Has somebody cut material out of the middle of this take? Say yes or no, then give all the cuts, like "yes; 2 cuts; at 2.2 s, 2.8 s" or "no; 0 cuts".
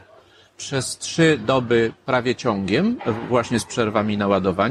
no; 0 cuts